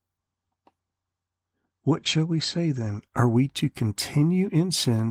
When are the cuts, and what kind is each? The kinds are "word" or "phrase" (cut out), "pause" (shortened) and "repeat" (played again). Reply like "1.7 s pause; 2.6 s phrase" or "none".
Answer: none